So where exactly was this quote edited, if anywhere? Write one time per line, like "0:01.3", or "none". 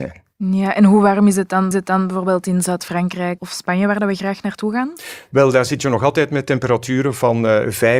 0:01.7
0:03.4